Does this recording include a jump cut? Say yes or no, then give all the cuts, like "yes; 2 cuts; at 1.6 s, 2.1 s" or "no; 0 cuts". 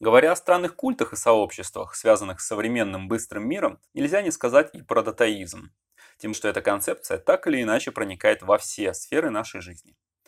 yes; 2 cuts; at 3.9 s, 6.3 s